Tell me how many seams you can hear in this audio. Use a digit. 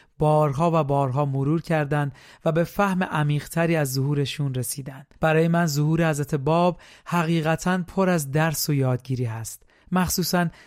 1